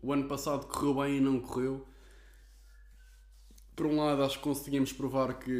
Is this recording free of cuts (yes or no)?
yes